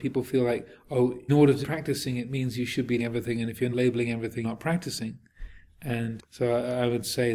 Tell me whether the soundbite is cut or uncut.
cut